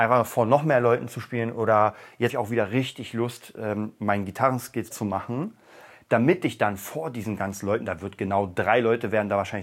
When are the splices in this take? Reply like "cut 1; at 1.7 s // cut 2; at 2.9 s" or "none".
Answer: cut 1; at 2.3 s // cut 2; at 4.9 s